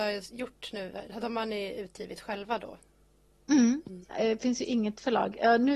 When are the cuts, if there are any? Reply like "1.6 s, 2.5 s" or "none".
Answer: none